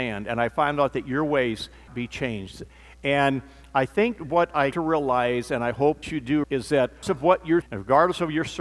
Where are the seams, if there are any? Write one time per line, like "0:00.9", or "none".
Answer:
0:01.9
0:04.2
0:04.7
0:06.0
0:06.4
0:07.0
0:07.6